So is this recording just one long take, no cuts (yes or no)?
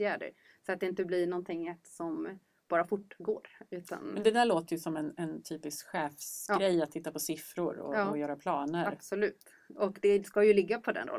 yes